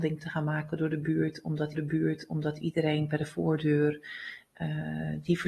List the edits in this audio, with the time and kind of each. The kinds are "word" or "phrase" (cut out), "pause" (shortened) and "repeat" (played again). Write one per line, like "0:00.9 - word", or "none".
0:01.7 - repeat